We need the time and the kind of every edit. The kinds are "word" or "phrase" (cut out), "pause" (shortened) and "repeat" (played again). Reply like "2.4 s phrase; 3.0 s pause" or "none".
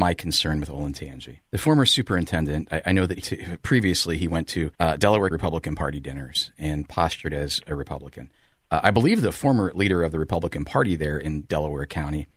1.5 s pause; 3.2 s phrase; 4.7 s pause; 5.3 s word